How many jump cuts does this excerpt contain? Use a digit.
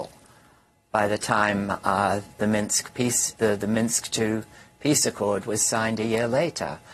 1